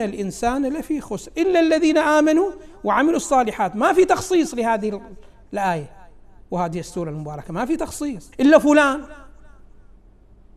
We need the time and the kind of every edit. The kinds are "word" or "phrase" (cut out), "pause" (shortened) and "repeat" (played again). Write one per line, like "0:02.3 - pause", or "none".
0:08.3 - pause